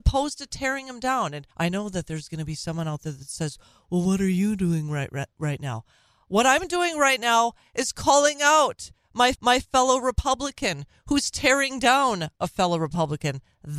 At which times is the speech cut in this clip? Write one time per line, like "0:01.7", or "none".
0:01.5
0:09.4